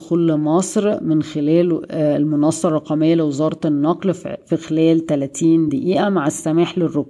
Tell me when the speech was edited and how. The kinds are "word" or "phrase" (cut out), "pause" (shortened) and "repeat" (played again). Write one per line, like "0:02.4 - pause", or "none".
none